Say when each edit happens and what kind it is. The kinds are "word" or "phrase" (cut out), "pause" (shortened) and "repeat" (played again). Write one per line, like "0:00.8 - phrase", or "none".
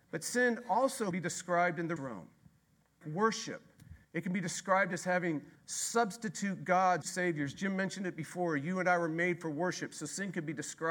0:01.1 - word
0:02.0 - word
0:03.0 - word
0:04.0 - pause
0:05.5 - pause
0:07.0 - phrase